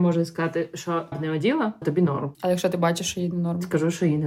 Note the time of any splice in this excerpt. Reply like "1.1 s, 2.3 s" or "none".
1.1 s, 1.8 s, 2.3 s